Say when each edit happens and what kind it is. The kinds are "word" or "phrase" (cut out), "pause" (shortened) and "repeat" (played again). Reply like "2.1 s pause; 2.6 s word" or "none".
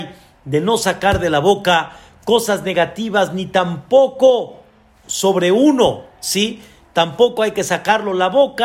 5.0 s word